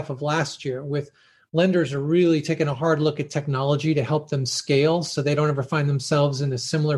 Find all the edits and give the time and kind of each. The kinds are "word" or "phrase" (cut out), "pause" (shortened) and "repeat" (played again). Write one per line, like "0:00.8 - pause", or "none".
none